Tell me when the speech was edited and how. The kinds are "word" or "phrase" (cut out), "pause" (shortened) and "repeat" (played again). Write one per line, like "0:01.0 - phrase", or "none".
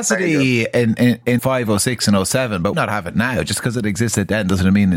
0:01.4 - word
0:02.7 - phrase